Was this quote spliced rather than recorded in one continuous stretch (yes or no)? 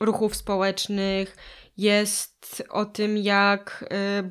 yes